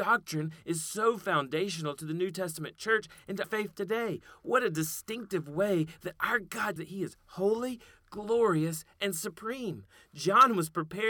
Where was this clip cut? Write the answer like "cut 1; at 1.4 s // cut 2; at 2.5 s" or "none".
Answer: cut 1; at 3.4 s // cut 2; at 6.8 s